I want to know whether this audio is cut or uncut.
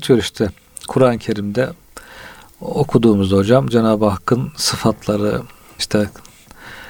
uncut